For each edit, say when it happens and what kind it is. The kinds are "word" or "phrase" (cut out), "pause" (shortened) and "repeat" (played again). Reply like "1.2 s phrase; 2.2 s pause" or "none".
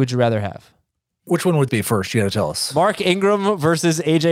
1.7 s word